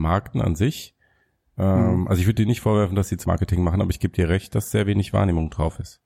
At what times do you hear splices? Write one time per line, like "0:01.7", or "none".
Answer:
0:03.2